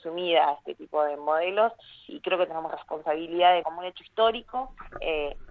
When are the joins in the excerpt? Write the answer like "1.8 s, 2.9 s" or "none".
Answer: 2.1 s, 2.7 s, 3.6 s